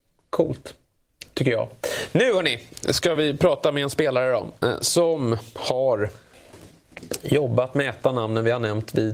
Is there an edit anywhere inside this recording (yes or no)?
no